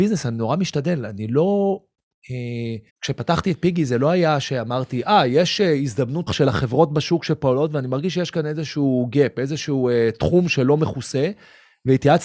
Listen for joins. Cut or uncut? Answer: cut